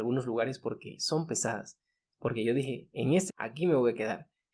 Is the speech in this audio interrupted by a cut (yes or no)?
yes